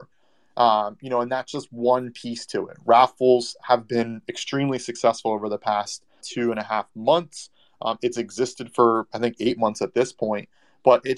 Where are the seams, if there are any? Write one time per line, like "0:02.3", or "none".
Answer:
0:06.2

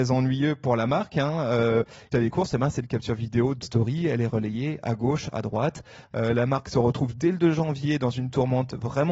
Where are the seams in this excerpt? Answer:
0:02.1
0:03.6

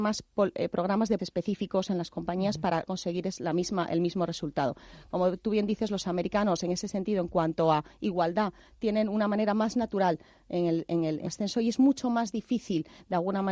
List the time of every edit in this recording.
0:01.2
0:02.9
0:11.3

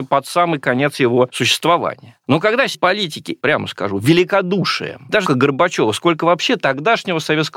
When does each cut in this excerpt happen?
0:02.7
0:03.4
0:05.3

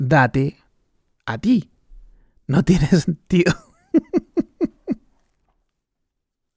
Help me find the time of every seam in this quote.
none

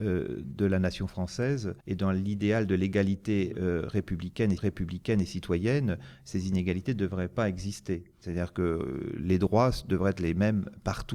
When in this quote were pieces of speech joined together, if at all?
0:01.8
0:04.6

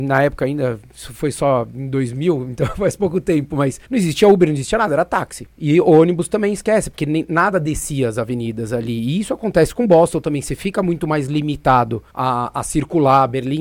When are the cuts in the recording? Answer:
0:03.8
0:05.5
0:12.1

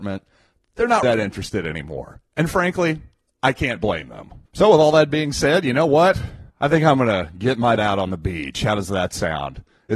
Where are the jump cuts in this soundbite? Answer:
0:01.0
0:04.4
0:06.5
0:07.8

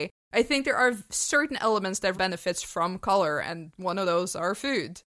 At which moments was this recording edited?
0:02.1

